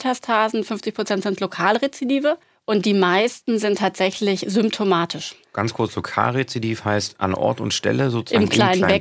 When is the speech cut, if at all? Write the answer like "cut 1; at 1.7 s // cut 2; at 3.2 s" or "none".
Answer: cut 1; at 2.4 s // cut 2; at 5.4 s